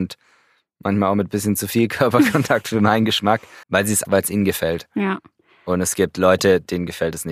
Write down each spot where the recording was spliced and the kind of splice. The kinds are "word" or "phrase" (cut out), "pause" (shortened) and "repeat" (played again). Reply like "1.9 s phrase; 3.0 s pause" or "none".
3.6 s pause; 4.0 s word